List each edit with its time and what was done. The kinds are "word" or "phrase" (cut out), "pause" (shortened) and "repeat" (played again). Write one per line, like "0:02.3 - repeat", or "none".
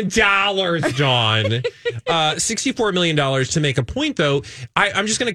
none